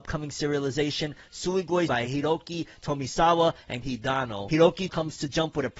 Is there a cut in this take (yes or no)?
yes